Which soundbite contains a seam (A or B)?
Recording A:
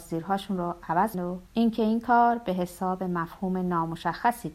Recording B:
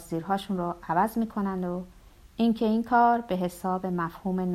A